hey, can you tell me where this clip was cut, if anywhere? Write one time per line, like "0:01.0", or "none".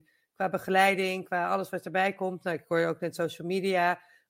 none